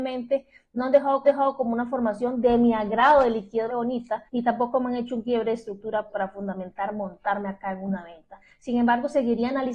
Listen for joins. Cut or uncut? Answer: cut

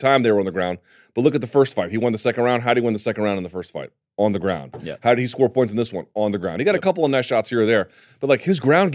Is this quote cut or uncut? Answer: uncut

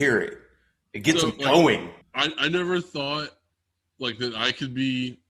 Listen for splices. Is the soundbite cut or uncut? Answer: cut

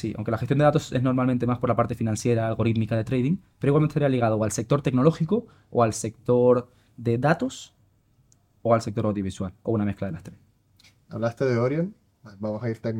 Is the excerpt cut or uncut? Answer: uncut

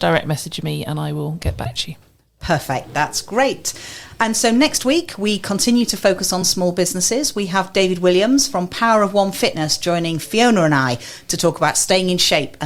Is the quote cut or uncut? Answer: uncut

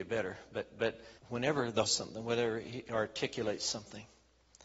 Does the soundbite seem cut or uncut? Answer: cut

